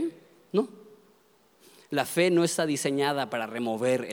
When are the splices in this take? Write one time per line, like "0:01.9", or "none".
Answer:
none

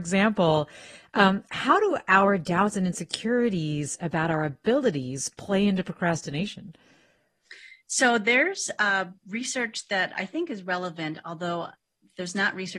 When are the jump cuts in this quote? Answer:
0:07.8
0:09.2

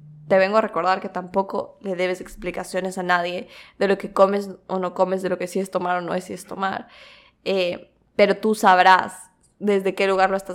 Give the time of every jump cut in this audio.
none

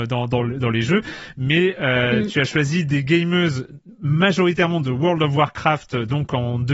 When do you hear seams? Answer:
none

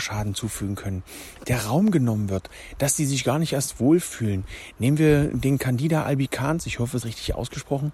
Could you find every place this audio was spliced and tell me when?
0:07.0

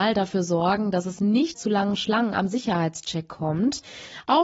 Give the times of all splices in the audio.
0:01.5

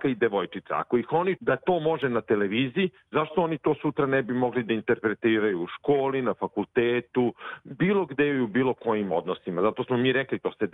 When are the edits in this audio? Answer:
0:01.4

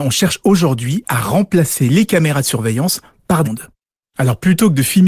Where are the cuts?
0:03.4

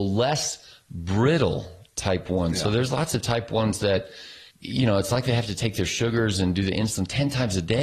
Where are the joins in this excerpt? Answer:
0:04.5

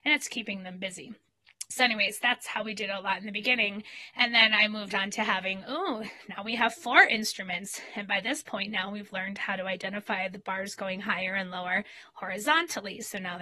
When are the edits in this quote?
none

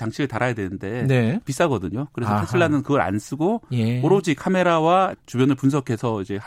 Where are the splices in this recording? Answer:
0:05.1

